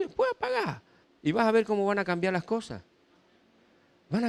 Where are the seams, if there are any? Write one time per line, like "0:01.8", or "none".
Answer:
0:01.0